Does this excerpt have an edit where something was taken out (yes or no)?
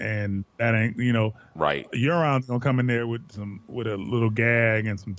no